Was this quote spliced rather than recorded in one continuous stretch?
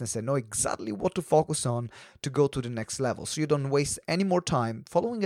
no; 0 cuts

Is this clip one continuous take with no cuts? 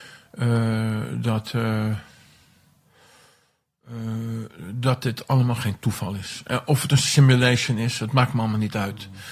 yes; 0 cuts

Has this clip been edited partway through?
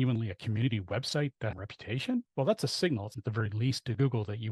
yes; 3 cuts; at 1.5 s, 2.3 s, 3.1 s

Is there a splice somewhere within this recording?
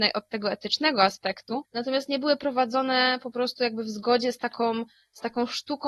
no; 0 cuts

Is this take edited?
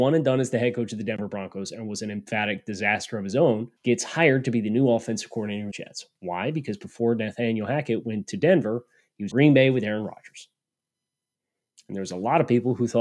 yes; 3 cuts; at 3.8 s, 5.7 s, 9.3 s

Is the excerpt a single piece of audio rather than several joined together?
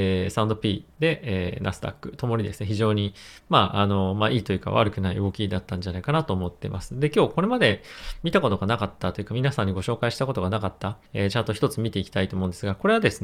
no; 2 cuts; at 0.9 s, 11.1 s

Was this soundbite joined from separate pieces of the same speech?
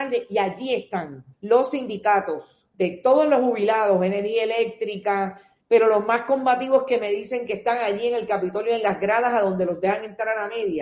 yes; 3 cuts; at 1.3 s, 2.7 s, 5.6 s

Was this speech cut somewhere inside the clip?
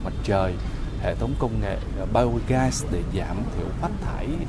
no; 0 cuts

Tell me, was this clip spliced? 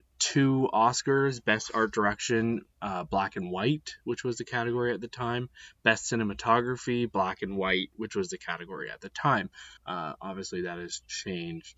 yes; 1 cut; at 9.8 s

